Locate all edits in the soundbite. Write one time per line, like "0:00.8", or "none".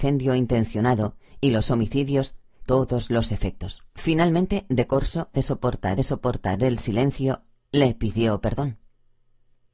0:02.7
0:03.9
0:05.3
0:06.0